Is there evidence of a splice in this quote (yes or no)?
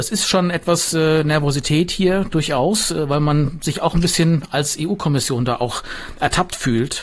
no